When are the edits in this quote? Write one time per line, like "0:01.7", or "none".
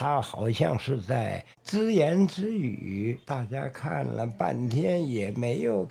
0:01.5
0:03.2